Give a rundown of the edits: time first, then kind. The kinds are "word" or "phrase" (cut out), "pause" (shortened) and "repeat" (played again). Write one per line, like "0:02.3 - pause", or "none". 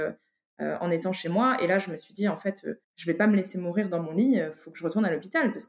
0:02.8 - pause